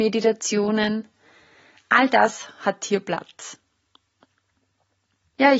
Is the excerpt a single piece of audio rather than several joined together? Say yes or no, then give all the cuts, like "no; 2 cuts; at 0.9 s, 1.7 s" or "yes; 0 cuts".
yes; 0 cuts